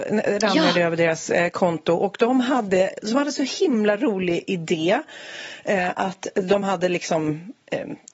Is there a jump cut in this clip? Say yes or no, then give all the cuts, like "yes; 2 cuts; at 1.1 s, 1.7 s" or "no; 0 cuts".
no; 0 cuts